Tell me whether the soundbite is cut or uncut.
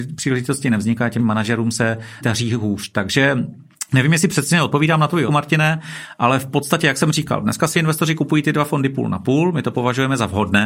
cut